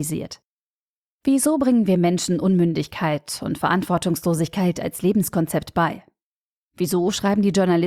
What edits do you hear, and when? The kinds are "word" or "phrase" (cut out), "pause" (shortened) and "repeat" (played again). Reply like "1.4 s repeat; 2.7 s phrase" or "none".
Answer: none